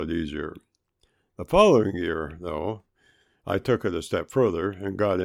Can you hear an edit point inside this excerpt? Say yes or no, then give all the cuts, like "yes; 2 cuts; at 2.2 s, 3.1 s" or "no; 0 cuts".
no; 0 cuts